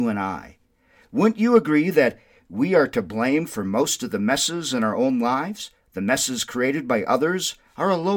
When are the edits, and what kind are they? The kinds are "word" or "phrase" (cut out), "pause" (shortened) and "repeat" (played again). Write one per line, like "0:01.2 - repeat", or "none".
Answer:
0:05.8 - pause

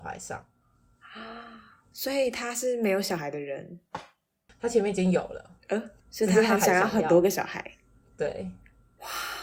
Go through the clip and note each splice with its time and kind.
0:06.0 - pause

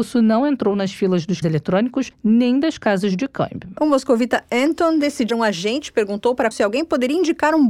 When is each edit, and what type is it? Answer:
0:01.4 - word
0:05.3 - word
0:06.5 - word

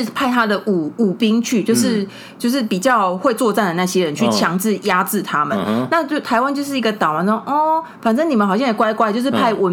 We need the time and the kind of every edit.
none

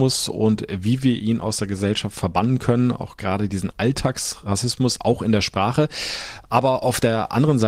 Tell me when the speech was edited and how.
none

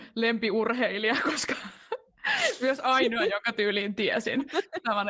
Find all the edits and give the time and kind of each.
none

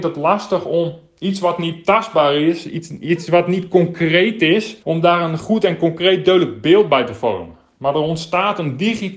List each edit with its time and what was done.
0:04.8 - pause

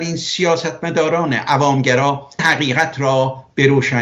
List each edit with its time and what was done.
0:02.4 - word

